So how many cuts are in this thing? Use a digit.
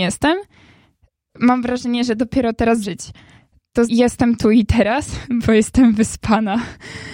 3